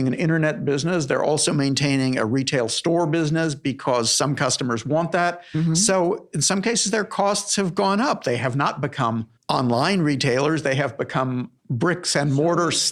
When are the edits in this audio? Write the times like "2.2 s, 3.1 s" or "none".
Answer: 9.4 s, 11.6 s